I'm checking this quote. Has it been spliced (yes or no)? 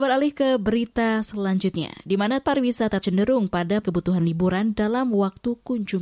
yes